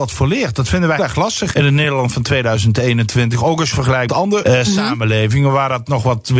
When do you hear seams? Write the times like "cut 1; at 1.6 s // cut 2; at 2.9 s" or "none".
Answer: cut 1; at 1.0 s // cut 2; at 1.5 s // cut 3; at 3.7 s // cut 4; at 4.1 s // cut 5; at 4.4 s